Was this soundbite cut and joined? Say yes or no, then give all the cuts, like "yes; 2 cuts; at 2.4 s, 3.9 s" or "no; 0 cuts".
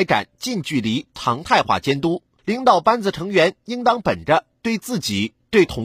no; 0 cuts